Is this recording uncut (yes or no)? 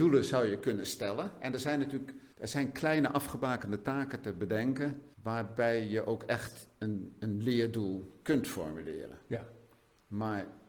no